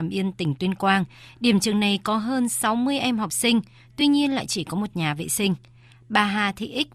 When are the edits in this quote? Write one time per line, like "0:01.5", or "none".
none